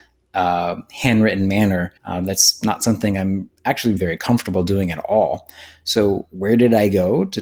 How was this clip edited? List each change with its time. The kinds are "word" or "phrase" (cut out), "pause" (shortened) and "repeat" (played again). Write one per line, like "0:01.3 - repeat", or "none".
0:02.0 - pause
0:04.0 - word